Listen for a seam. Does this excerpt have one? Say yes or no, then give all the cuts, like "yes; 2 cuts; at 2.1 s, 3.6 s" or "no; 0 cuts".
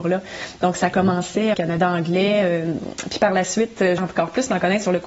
yes; 2 cuts; at 1.5 s, 4.0 s